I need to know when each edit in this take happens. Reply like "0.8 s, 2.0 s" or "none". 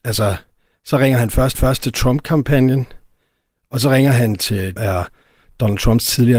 1.5 s, 4.8 s